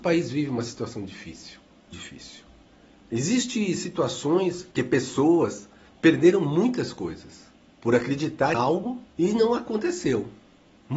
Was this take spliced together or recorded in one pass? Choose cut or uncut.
cut